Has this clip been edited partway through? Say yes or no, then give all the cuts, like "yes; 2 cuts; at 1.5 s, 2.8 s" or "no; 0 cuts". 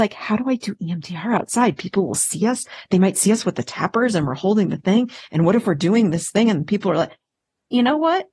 no; 0 cuts